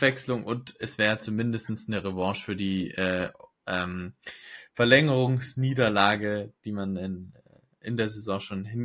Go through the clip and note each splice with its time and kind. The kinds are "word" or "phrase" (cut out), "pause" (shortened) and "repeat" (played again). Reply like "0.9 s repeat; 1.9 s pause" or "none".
none